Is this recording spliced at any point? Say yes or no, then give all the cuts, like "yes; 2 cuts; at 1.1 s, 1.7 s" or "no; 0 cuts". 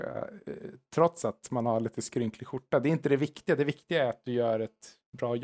no; 0 cuts